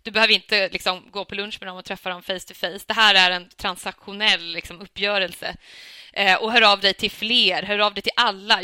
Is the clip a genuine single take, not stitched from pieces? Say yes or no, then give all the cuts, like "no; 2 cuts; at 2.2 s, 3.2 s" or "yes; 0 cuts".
yes; 0 cuts